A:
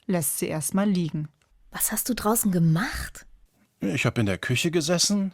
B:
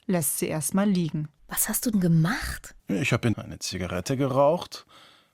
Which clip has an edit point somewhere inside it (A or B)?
B